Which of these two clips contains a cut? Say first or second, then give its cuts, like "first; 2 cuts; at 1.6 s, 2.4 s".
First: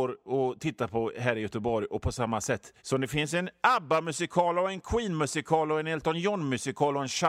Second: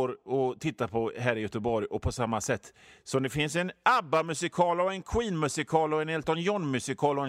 first; 1 cut; at 2.8 s